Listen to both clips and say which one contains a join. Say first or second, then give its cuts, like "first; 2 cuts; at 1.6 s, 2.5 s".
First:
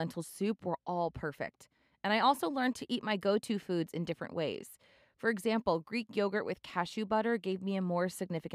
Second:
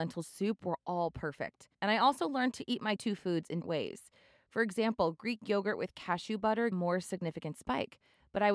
second; 4 cuts; at 1.7 s, 3.0 s, 3.6 s, 6.7 s